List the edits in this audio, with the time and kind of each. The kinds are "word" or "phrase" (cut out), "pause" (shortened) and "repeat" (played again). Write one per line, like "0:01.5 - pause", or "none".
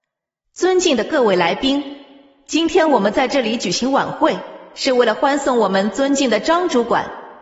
none